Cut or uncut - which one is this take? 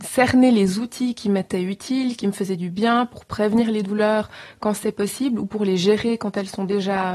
uncut